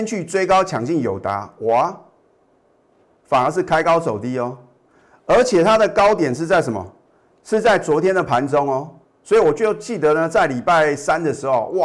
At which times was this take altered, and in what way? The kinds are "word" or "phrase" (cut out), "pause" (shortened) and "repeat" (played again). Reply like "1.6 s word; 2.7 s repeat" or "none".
9.0 s pause